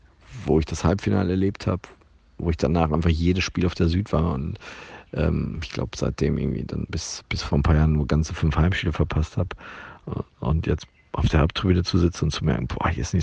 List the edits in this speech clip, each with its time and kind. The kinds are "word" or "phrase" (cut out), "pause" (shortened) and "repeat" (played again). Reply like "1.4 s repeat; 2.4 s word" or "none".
none